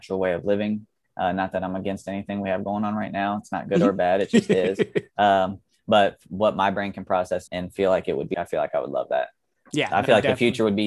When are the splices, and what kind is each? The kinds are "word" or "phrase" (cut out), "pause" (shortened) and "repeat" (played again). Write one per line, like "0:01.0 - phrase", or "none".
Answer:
0:07.5 - word
0:08.3 - word